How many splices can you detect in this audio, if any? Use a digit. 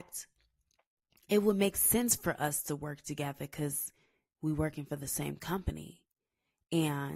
0